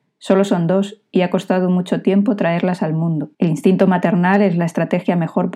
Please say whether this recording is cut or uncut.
cut